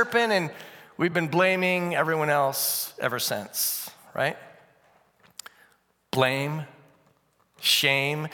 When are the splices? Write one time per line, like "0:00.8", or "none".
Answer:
none